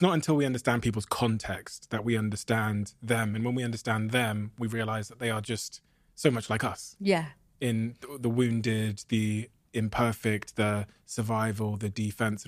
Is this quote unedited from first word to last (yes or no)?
yes